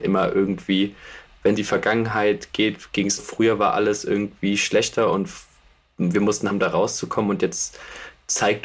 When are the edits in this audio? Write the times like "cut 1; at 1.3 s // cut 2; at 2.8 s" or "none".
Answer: cut 1; at 1.6 s // cut 2; at 3.2 s // cut 3; at 6.5 s